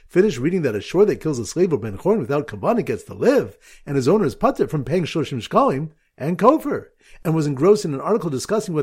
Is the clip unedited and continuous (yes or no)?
yes